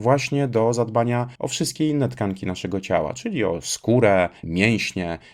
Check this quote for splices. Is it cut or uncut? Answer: cut